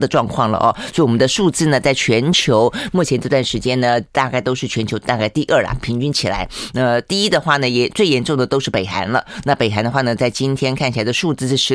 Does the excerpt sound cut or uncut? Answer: uncut